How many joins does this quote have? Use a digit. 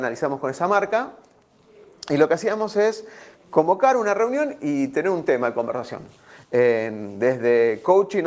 0